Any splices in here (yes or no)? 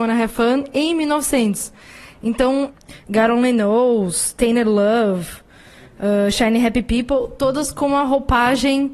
no